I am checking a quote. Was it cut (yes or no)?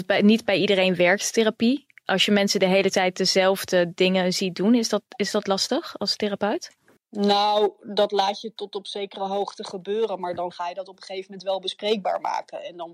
yes